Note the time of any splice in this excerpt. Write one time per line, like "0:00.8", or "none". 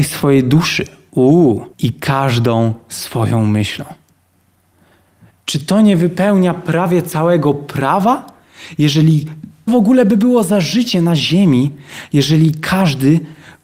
0:01.7
0:09.7

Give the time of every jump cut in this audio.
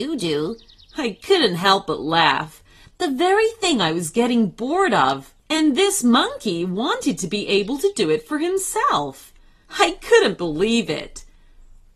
none

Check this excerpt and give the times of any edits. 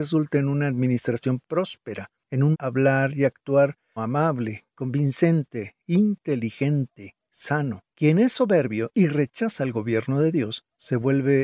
0:01.4
0:02.5
0:04.0
0:07.9

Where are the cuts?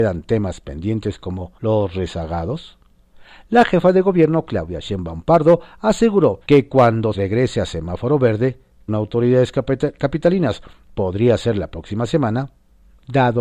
0:01.6
0:06.4
0:07.1
0:08.9

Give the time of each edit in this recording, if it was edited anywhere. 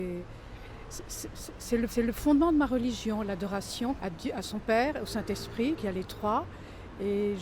0:01.9
0:04.0
0:05.8

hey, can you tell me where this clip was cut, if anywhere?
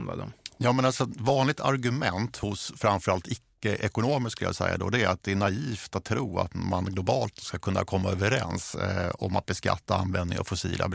none

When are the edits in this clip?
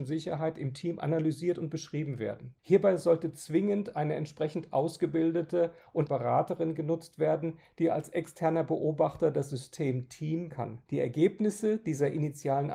0:02.6
0:06.1
0:10.5
0:10.9

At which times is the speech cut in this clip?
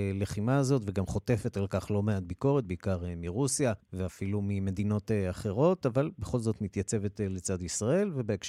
0:03.8

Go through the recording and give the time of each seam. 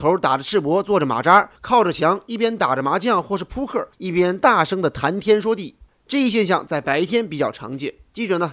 0:01.6
0:03.9

